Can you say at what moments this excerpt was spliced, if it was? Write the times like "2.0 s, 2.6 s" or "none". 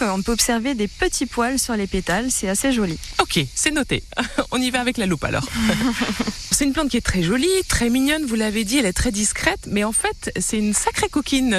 6.5 s